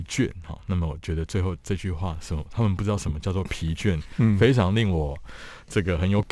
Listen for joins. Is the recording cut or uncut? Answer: uncut